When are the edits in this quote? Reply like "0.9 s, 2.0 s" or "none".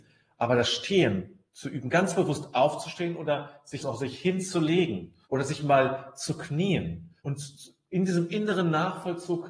1.5 s, 3.8 s, 5.2 s, 7.2 s